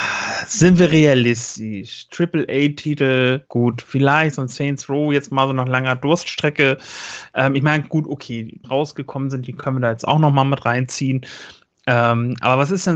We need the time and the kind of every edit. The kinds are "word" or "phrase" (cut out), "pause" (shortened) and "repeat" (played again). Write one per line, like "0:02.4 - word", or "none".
0:03.5 - pause
0:08.6 - phrase